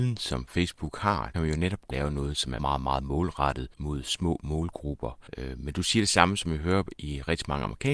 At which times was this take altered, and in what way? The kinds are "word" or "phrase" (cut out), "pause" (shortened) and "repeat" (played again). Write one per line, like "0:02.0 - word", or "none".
0:01.3 - phrase
0:01.9 - phrase
0:02.6 - word
0:03.7 - pause
0:05.3 - pause